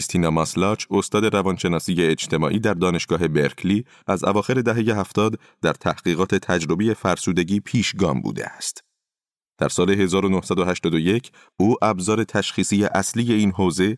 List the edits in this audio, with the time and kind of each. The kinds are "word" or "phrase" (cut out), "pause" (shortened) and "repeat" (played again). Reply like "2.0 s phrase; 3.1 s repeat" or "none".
none